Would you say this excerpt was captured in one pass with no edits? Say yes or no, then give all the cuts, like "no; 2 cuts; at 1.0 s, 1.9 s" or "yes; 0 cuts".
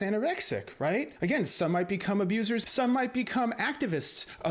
no; 2 cuts; at 1.2 s, 2.6 s